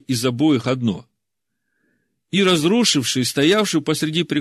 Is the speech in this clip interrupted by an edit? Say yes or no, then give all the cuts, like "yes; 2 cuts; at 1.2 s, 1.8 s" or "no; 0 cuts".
no; 0 cuts